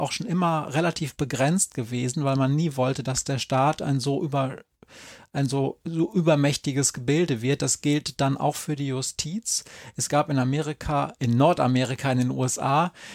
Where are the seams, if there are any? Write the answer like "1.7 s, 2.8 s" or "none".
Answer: none